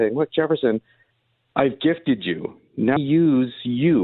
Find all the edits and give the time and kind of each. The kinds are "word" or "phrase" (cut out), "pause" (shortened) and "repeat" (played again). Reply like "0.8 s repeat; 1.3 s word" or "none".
3.0 s phrase